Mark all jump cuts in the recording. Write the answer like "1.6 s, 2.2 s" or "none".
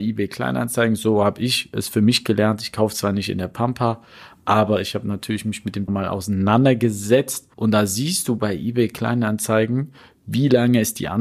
5.9 s, 7.5 s